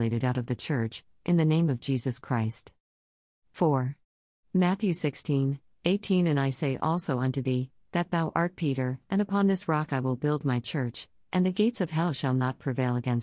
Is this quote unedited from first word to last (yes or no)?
yes